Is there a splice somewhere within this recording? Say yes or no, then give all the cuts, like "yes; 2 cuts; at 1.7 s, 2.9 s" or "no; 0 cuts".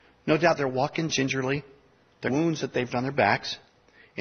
yes; 2 cuts; at 2.3 s, 2.9 s